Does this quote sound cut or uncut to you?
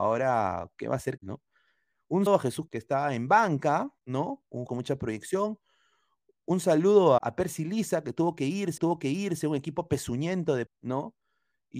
cut